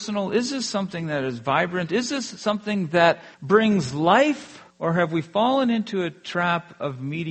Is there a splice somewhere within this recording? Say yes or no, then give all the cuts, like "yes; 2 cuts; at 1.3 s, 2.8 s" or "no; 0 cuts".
yes; 2 cuts; at 3.3 s, 4.7 s